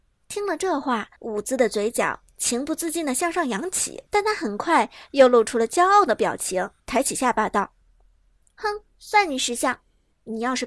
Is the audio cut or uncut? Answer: cut